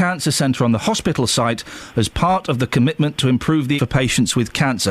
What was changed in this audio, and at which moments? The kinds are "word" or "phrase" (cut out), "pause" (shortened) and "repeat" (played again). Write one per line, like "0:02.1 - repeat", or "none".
0:03.8 - word